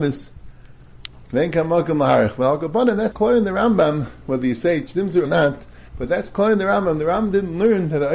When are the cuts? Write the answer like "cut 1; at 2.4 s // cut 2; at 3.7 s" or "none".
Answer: cut 1; at 3.1 s // cut 2; at 5.2 s // cut 3; at 5.9 s